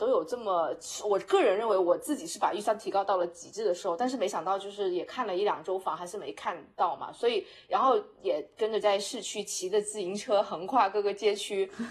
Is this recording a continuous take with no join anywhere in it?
no; 1 cut; at 8.8 s

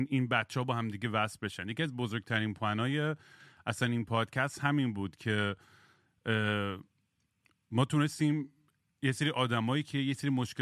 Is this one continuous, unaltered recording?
yes; 0 cuts

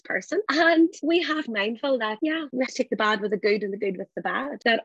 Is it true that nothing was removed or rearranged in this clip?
no; 2 cuts; at 1.5 s, 2.7 s

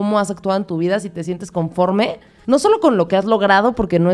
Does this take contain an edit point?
no; 0 cuts

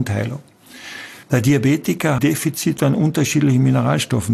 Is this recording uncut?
no; 2 cuts; at 1.2 s, 2.2 s

